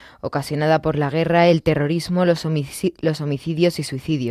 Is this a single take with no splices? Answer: yes; 0 cuts

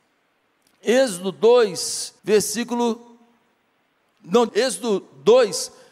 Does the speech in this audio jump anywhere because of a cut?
yes; 2 cuts; at 2.2 s, 4.5 s

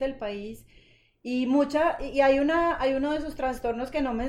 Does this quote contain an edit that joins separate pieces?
no; 0 cuts

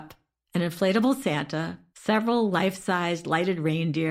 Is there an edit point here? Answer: yes; 1 cut; at 1.9 s

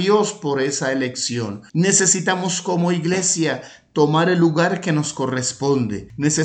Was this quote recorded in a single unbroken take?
yes; 0 cuts

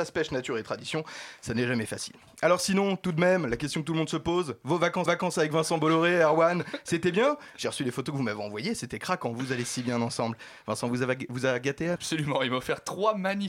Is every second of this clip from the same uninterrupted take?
no; 2 cuts; at 5.1 s, 12.0 s

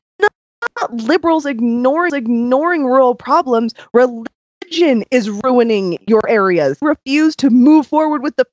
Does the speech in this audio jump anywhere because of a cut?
yes; 2 cuts; at 2.1 s, 6.8 s

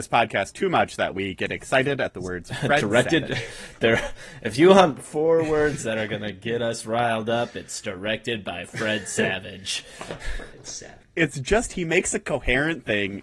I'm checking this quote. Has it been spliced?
yes; 1 cut; at 11.0 s

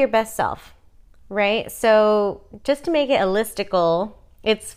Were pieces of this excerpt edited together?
no; 0 cuts

